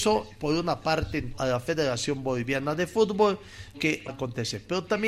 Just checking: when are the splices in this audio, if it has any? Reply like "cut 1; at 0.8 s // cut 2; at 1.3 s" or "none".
cut 1; at 1.3 s // cut 2; at 3.7 s // cut 3; at 4.1 s